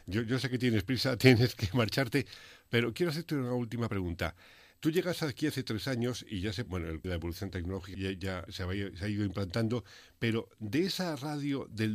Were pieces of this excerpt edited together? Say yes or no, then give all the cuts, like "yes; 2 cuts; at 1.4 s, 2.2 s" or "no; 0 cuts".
yes; 4 cuts; at 6.7 s, 7.0 s, 7.9 s, 8.5 s